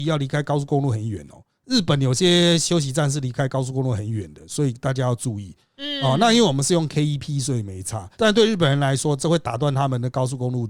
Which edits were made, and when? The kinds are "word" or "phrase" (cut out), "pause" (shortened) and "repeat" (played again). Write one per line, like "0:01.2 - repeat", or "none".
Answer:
0:01.6 - pause
0:08.1 - pause